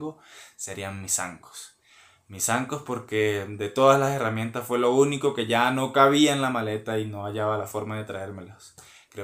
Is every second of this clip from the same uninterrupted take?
yes; 0 cuts

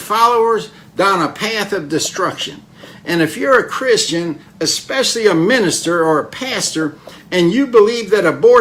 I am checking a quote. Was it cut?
no; 0 cuts

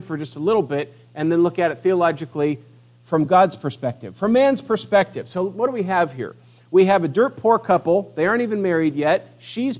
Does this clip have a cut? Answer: no; 0 cuts

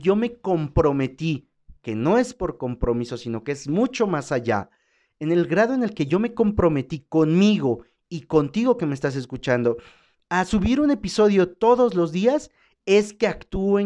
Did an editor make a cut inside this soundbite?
no; 0 cuts

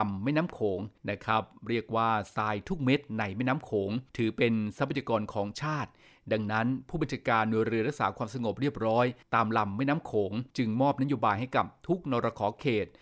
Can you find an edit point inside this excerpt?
yes; 4 cuts; at 1.0 s, 4.1 s, 9.2 s, 10.5 s

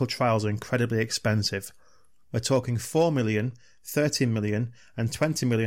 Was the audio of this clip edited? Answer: no; 0 cuts

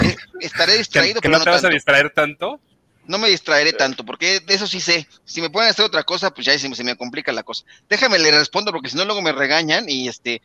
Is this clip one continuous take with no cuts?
yes; 0 cuts

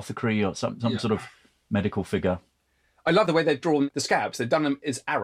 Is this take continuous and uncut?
yes; 0 cuts

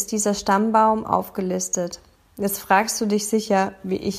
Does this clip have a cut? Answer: no; 0 cuts

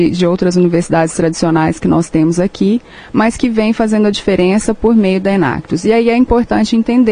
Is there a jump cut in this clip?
no; 0 cuts

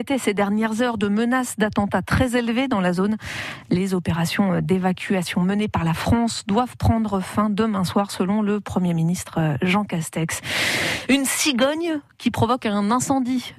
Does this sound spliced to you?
no; 0 cuts

